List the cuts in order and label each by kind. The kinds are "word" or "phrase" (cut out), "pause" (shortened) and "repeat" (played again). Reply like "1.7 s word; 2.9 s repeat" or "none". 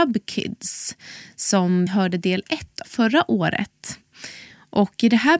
1.9 s word; 2.8 s word